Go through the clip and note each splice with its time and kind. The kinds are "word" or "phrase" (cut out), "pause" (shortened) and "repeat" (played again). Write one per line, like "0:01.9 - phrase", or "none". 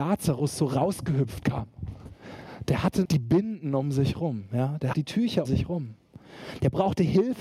0:03.1 - word
0:04.9 - phrase
0:05.5 - word